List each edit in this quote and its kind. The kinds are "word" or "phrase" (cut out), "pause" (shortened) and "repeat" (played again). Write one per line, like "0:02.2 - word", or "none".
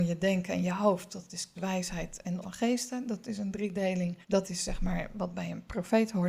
0:01.6 - word
0:02.4 - word
0:04.2 - pause